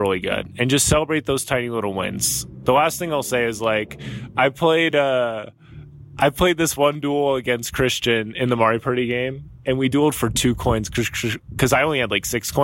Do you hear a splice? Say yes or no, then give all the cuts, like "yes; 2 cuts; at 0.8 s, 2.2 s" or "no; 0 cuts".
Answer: no; 0 cuts